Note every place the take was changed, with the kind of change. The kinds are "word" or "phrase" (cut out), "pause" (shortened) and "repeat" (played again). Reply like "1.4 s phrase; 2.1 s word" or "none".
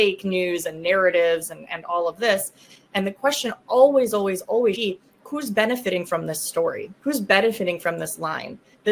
4.7 s word; 7.0 s pause

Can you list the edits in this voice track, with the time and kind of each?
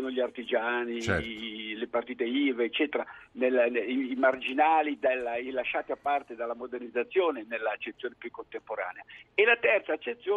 none

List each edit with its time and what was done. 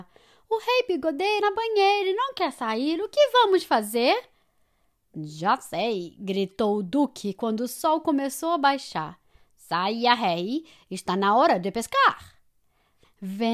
1.4 s word

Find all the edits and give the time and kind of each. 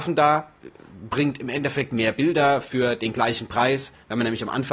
none

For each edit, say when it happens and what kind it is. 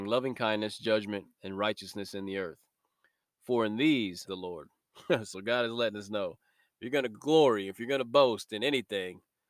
4.2 s phrase

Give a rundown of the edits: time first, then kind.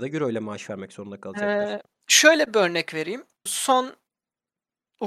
3.5 s word

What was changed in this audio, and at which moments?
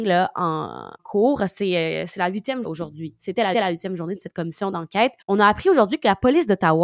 1.0 s word; 2.6 s word; 3.5 s repeat; 5.2 s pause

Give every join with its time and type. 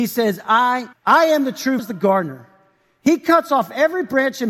0.9 s word; 1.8 s phrase

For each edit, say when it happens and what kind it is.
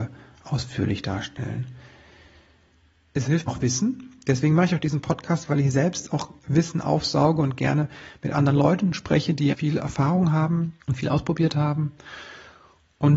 3.5 s word; 9.5 s word; 10.8 s pause

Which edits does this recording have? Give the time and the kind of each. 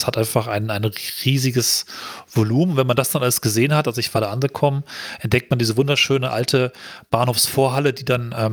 none

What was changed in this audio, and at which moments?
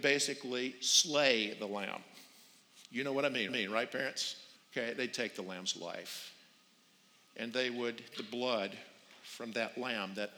3.5 s repeat; 4.6 s pause; 8.1 s word

